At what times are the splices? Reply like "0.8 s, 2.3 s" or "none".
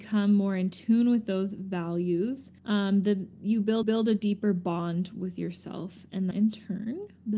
2.6 s, 3.8 s, 6.3 s